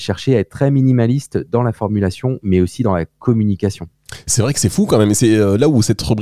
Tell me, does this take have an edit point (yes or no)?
no